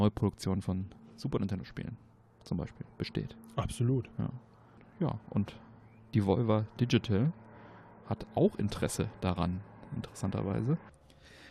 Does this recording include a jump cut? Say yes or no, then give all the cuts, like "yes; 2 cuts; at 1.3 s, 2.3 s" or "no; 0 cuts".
no; 0 cuts